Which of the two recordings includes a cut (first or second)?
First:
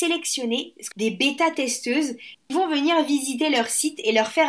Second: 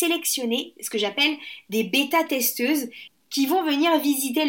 first